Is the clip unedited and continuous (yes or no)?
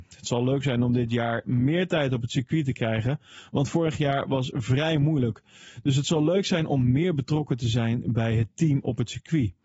yes